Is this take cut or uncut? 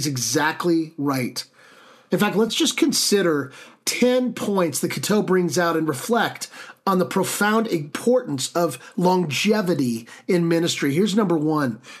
uncut